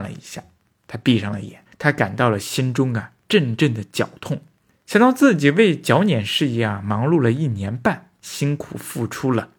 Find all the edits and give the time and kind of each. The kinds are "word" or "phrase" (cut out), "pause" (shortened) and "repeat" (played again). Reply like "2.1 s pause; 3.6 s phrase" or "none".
4.7 s pause